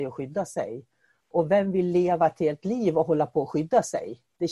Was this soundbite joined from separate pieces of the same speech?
no; 0 cuts

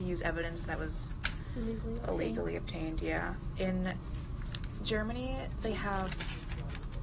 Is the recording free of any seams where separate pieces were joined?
yes; 0 cuts

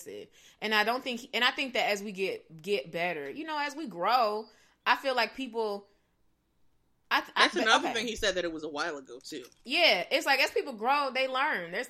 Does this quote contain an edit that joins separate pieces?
no; 0 cuts

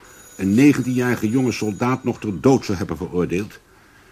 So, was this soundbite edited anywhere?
no; 0 cuts

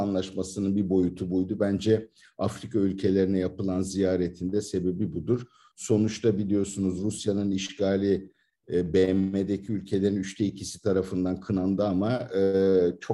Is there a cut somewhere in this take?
no; 0 cuts

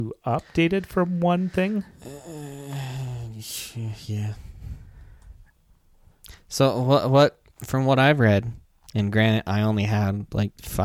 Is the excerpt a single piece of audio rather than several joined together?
no; 2 cuts; at 1.9 s, 7.5 s

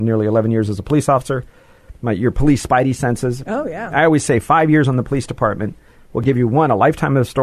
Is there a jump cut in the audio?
no; 0 cuts

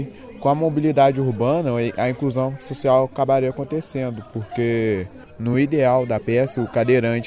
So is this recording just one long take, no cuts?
yes; 0 cuts

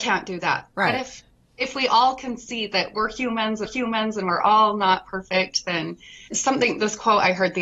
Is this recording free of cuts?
no; 3 cuts; at 1.3 s, 3.7 s, 6.3 s

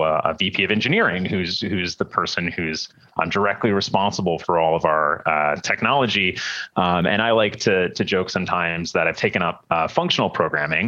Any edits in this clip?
no; 0 cuts

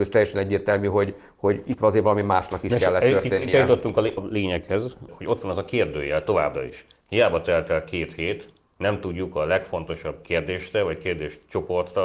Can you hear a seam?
yes; 1 cut; at 4.2 s

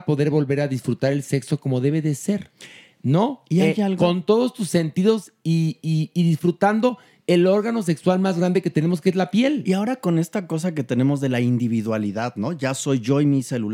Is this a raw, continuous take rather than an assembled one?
yes; 0 cuts

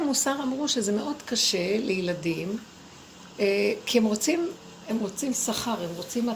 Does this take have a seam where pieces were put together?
no; 0 cuts

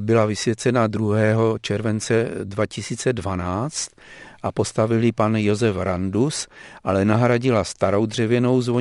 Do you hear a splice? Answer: no; 0 cuts

